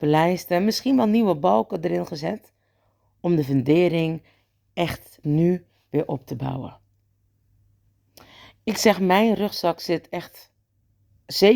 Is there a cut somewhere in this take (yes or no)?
yes